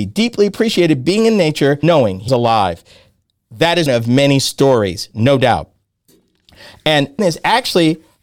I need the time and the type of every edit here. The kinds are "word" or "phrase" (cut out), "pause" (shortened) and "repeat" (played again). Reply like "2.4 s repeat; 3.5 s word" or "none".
1.8 s word; 2.3 s word; 3.9 s word; 7.2 s word